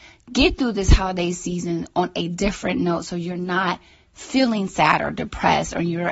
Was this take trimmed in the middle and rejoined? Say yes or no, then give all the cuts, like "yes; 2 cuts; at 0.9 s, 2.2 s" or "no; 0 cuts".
no; 0 cuts